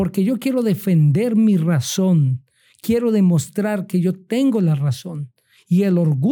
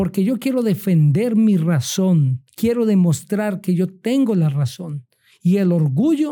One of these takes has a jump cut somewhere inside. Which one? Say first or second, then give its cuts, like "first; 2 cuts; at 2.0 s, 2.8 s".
second; 1 cut; at 2.5 s